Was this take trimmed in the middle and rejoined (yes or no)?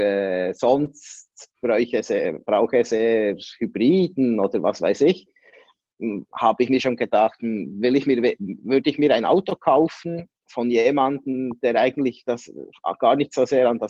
yes